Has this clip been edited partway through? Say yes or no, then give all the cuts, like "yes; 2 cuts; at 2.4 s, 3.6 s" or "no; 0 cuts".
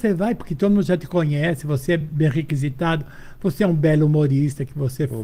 no; 0 cuts